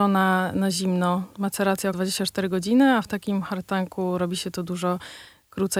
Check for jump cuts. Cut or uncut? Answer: cut